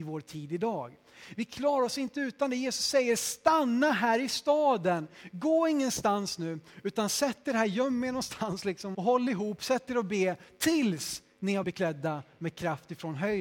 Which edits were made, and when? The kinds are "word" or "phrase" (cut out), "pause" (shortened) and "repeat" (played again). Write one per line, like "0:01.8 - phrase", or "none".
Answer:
0:08.9 - word
0:11.6 - word